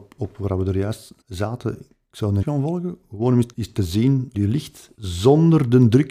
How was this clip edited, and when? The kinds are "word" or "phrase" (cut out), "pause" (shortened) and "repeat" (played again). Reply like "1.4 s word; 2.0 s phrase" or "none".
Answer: 1.2 s pause; 2.4 s word; 3.5 s pause; 4.3 s phrase; 4.9 s pause